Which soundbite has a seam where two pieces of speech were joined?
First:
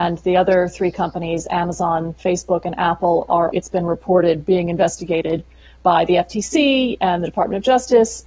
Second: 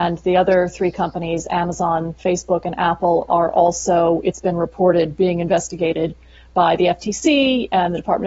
first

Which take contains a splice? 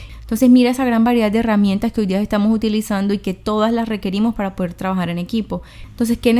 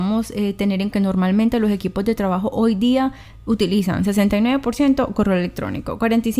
second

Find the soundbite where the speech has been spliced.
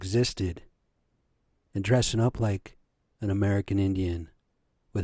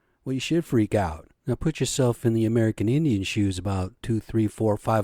second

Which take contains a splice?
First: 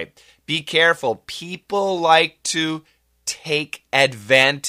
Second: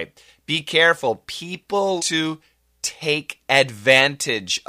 second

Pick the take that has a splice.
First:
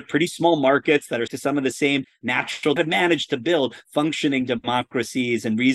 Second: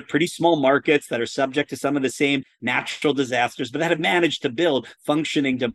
first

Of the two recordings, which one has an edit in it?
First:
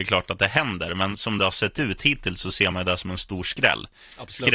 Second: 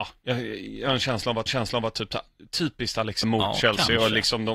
second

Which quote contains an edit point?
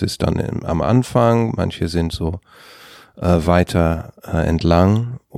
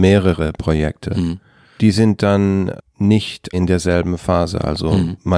second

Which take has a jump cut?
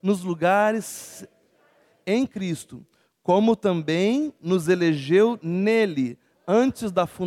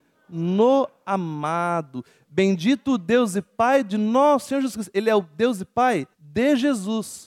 second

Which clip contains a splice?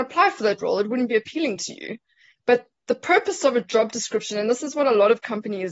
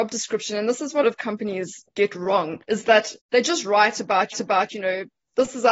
second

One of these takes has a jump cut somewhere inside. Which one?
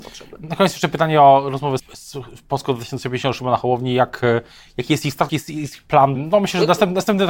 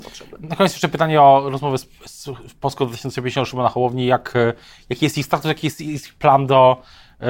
first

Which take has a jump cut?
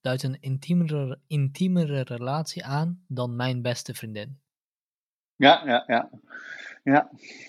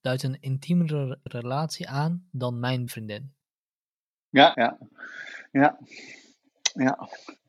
second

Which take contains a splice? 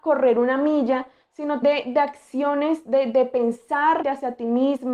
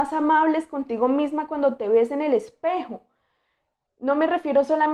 first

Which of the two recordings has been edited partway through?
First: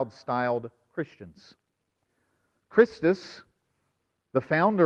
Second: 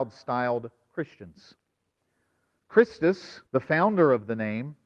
second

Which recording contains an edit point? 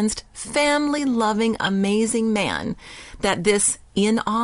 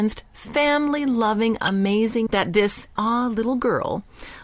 second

